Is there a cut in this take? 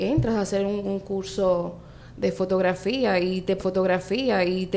yes; 1 cut; at 3.6 s

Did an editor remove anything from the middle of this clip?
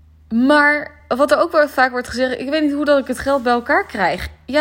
no; 0 cuts

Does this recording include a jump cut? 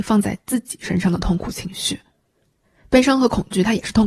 no; 0 cuts

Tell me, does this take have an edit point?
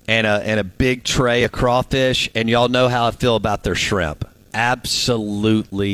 yes; 1 cut; at 4.4 s

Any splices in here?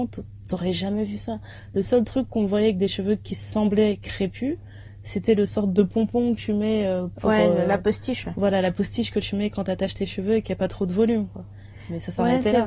no; 0 cuts

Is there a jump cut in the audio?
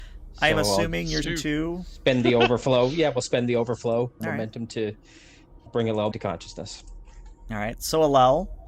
yes; 4 cuts; at 1.2 s, 4.2 s, 5.7 s, 6.1 s

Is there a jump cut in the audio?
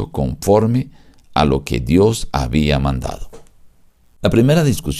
no; 0 cuts

